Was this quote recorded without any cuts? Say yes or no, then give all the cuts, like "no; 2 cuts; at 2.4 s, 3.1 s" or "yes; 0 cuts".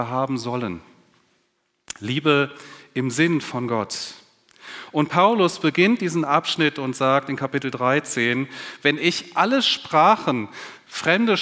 yes; 0 cuts